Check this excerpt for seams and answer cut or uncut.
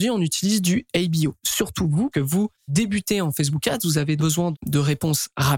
cut